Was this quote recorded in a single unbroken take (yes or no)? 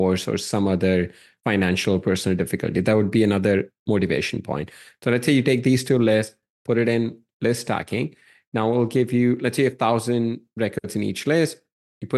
yes